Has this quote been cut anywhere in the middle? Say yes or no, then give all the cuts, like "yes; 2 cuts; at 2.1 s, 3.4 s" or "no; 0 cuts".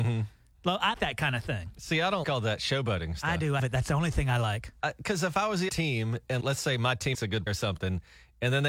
yes; 7 cuts; at 0.9 s, 2.2 s, 3.6 s, 5.7 s, 6.4 s, 7.1 s, 7.5 s